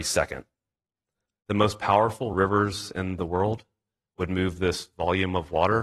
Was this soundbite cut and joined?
no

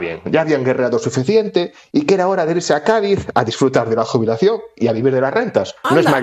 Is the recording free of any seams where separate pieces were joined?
yes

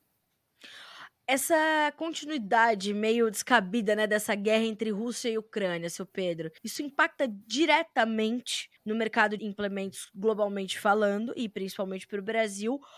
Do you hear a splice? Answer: yes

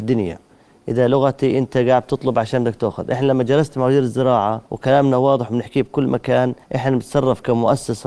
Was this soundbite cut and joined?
yes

